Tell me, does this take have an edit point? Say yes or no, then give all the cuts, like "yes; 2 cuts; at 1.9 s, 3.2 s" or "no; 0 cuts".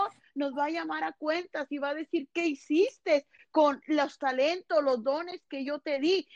no; 0 cuts